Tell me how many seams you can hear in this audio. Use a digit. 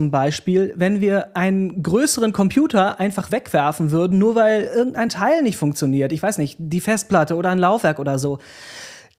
0